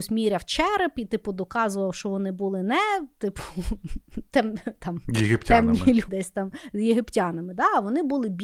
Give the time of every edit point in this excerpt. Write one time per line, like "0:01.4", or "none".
0:06.1